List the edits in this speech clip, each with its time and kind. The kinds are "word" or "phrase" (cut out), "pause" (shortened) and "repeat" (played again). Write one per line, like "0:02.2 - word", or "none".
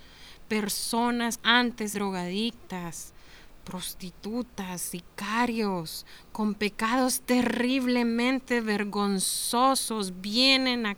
0:01.4 - word
0:01.9 - word